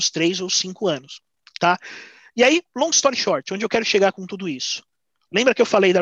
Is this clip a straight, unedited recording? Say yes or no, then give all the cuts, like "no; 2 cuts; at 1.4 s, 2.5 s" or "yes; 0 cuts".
yes; 0 cuts